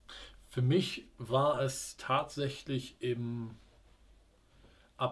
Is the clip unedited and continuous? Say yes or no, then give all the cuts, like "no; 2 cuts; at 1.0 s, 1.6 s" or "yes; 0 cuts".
yes; 0 cuts